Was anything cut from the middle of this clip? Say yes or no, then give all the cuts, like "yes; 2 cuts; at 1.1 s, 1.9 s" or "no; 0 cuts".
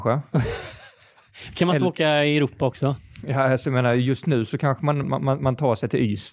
yes; 1 cut; at 5.0 s